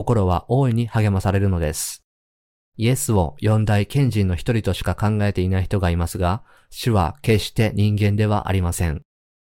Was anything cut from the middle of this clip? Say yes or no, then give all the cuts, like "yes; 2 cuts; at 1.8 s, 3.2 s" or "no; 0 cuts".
no; 0 cuts